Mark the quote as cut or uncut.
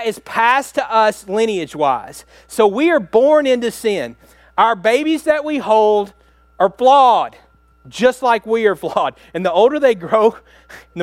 uncut